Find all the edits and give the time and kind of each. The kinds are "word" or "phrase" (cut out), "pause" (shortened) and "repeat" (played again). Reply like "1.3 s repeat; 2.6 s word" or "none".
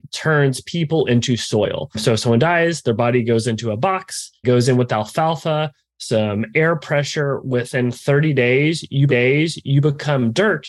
4.4 s word; 9.1 s repeat